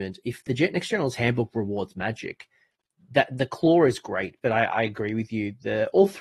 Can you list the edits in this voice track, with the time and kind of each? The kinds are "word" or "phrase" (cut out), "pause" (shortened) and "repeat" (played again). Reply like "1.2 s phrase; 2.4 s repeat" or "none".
none